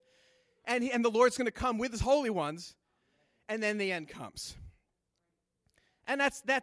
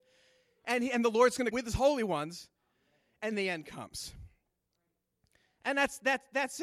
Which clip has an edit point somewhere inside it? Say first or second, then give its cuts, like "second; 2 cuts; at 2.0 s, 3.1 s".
second; 2 cuts; at 1.5 s, 3.3 s